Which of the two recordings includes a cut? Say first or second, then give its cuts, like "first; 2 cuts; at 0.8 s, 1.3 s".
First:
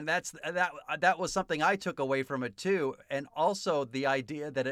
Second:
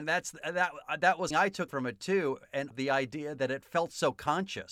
second; 3 cuts; at 1.3 s, 1.7 s, 2.7 s